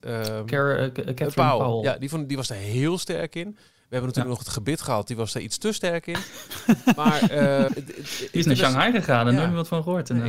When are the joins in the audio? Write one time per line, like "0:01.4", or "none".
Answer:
0:07.7